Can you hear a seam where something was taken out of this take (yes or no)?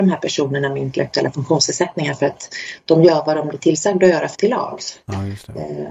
yes